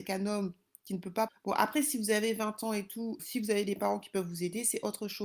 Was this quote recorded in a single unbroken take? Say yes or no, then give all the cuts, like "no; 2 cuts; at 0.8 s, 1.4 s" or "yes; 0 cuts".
no; 2 cuts; at 1.3 s, 3.2 s